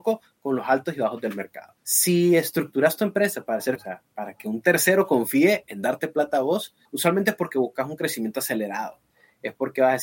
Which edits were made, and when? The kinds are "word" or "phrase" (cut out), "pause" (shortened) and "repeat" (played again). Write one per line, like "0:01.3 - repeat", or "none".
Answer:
0:01.8 - pause
0:03.8 - word
0:06.8 - pause